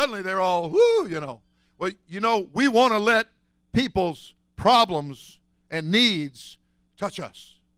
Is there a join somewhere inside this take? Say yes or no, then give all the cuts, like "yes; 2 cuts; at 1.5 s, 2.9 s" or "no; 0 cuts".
no; 0 cuts